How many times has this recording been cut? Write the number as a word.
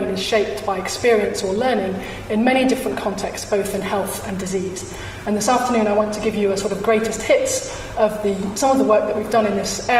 zero